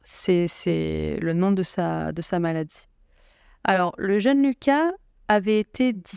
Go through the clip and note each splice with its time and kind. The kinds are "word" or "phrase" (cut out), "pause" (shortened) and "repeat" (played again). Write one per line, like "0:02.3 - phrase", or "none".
none